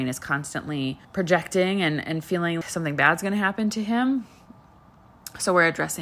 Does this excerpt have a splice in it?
yes; 2 cuts; at 1.0 s, 2.6 s

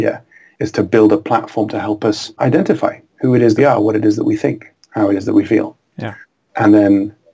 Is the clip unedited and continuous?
no; 1 cut; at 3.6 s

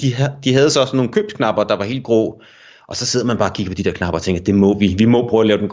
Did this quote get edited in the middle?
no; 0 cuts

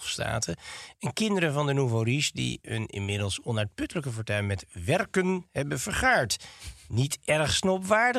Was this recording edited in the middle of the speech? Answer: no; 0 cuts

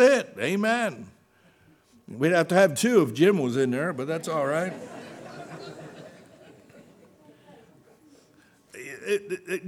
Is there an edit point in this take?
no; 0 cuts

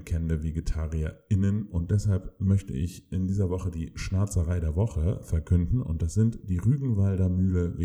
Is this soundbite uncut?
yes; 0 cuts

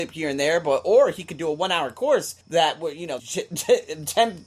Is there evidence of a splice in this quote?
yes; 2 cuts; at 2.4 s, 3.2 s

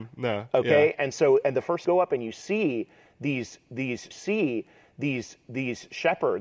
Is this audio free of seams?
no; 2 cuts; at 1.8 s, 4.1 s

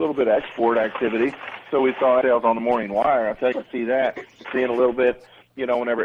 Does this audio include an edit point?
yes; 3 cuts; at 2.2 s, 3.5 s, 4.4 s

